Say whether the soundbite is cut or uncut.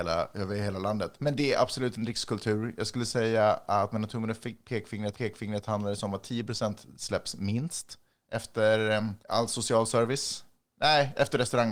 cut